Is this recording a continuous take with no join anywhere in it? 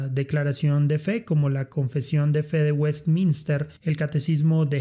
no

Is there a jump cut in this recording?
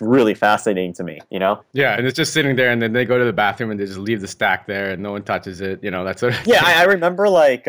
yes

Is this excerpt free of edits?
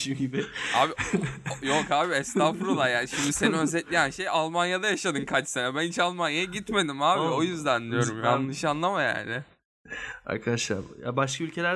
yes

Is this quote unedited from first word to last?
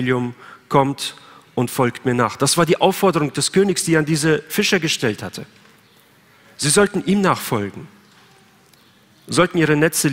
yes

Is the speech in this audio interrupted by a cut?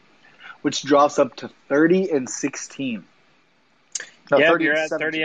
no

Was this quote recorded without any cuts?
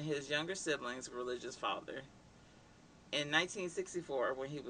no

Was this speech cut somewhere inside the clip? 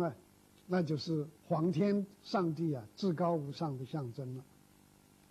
yes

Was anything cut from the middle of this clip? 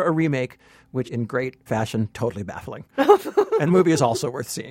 yes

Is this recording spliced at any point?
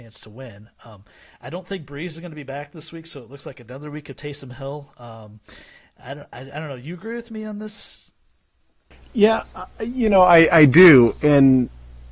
no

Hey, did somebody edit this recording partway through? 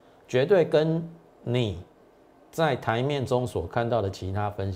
no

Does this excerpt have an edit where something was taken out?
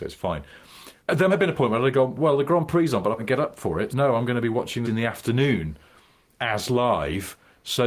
yes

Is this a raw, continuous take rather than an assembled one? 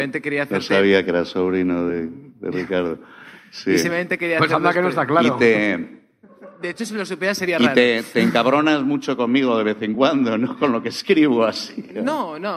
yes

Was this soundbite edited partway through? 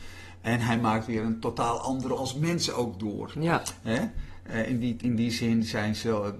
yes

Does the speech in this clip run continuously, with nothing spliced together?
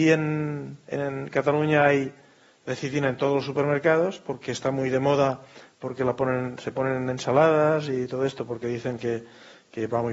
yes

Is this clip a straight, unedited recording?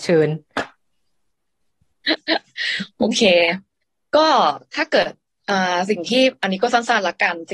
yes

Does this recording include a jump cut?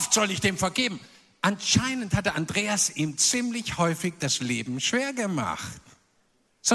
no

